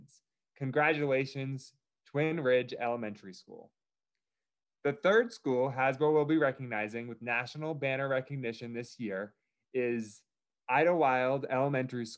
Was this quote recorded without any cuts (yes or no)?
yes